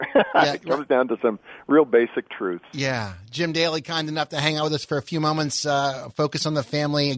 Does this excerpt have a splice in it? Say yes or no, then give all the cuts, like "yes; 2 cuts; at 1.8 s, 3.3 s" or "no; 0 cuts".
no; 0 cuts